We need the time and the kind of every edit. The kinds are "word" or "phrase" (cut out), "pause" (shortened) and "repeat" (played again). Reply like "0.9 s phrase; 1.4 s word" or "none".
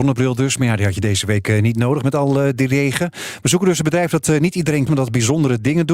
4.9 s word